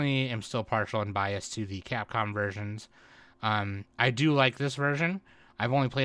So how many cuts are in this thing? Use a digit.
0